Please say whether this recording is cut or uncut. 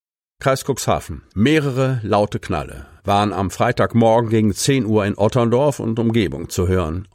cut